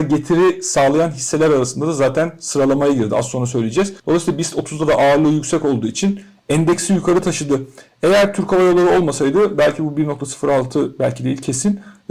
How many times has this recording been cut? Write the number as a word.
one